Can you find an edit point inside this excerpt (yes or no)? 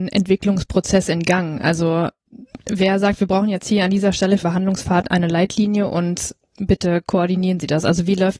yes